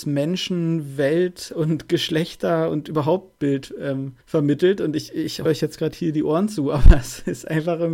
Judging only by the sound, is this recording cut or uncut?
cut